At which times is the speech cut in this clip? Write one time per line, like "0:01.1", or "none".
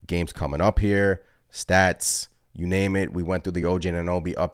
none